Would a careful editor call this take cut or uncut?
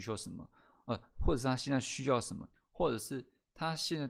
cut